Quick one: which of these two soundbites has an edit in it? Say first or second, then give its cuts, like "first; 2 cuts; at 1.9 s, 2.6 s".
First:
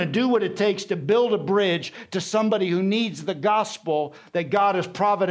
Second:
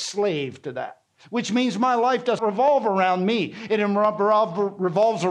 second; 1 cut; at 2.4 s